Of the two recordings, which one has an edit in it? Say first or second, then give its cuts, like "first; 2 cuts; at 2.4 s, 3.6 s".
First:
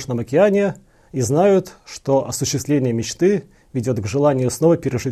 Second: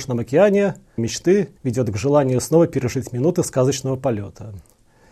second; 2 cuts; at 1.0 s, 1.6 s